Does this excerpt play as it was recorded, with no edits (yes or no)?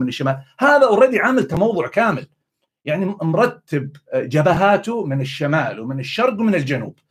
yes